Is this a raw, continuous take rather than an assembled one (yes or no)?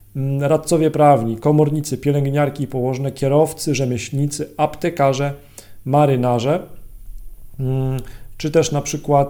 yes